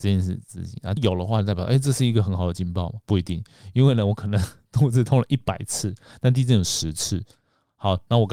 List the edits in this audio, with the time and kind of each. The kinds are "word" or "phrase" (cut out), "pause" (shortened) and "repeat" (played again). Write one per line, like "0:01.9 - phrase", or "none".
0:01.0 - phrase
0:03.0 - pause